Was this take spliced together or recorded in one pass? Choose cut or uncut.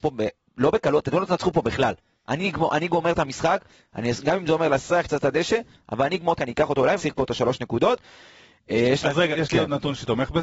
cut